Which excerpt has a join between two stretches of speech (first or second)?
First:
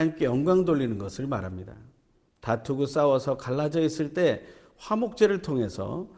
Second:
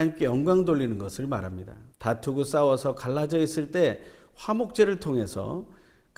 second